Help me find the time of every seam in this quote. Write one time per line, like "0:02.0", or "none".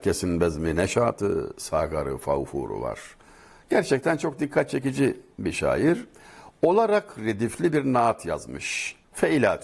none